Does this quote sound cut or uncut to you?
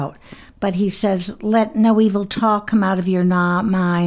uncut